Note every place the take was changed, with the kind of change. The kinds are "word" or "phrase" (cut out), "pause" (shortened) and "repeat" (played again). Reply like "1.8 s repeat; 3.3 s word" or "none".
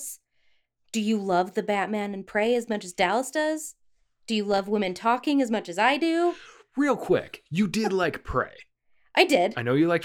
none